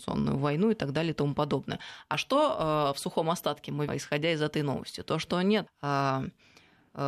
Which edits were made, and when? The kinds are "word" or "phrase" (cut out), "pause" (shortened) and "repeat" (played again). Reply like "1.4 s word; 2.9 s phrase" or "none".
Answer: 3.9 s word; 5.7 s word